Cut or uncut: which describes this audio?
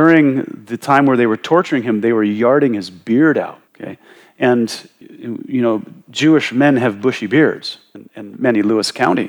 cut